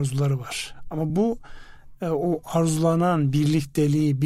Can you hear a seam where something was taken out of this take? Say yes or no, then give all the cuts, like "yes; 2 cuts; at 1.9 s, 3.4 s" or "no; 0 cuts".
no; 0 cuts